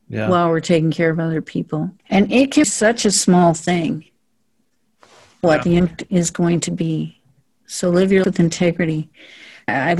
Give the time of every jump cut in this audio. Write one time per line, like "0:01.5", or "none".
0:02.6
0:05.4
0:08.2